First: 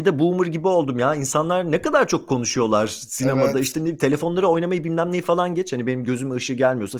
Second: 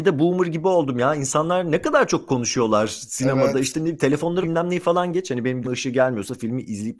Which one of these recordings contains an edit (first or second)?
second